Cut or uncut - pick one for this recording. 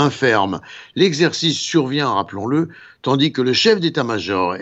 uncut